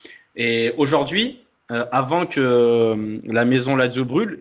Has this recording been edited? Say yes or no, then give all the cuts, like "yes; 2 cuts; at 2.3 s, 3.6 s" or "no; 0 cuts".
no; 0 cuts